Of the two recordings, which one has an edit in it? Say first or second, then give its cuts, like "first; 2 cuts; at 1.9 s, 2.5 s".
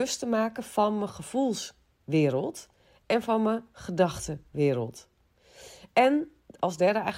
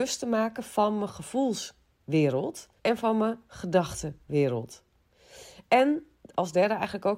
second; 1 cut; at 2.8 s